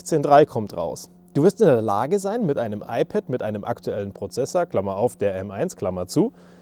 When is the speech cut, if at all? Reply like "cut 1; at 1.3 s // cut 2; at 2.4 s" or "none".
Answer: none